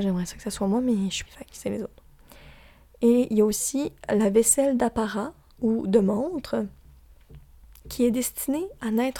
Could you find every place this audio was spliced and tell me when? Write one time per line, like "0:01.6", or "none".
0:01.3